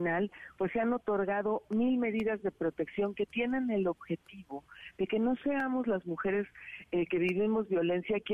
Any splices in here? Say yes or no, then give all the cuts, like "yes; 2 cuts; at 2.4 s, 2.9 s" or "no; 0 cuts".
no; 0 cuts